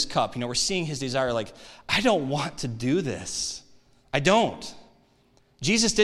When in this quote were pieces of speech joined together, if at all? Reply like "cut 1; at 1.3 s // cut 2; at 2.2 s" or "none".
none